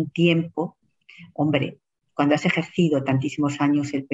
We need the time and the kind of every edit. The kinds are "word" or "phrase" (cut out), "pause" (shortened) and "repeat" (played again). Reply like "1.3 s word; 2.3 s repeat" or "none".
none